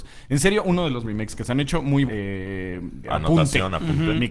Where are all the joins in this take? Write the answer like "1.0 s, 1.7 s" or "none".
1.0 s, 2.1 s, 3.0 s